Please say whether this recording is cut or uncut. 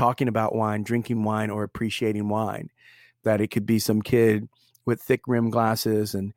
uncut